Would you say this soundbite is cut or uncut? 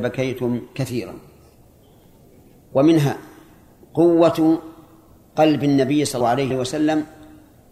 cut